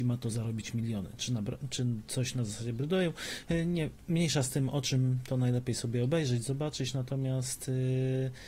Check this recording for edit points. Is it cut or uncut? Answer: uncut